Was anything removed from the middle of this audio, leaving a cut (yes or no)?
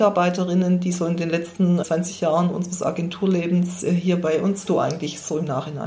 yes